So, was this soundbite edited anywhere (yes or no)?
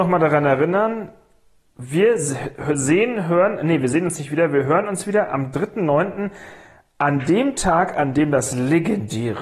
no